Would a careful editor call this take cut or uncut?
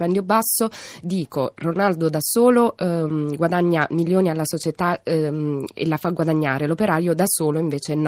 uncut